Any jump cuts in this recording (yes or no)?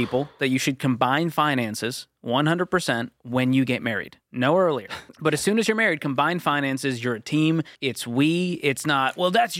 yes